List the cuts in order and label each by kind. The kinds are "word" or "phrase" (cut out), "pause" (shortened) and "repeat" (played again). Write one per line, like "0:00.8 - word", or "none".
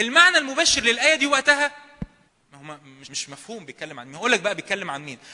0:02.3 - pause
0:03.0 - phrase